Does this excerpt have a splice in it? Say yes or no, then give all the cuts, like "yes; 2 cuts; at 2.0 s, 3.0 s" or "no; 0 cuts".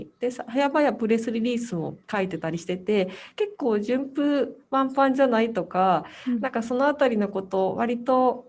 no; 0 cuts